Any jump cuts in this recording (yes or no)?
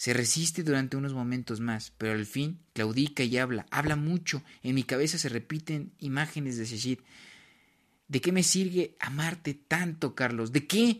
no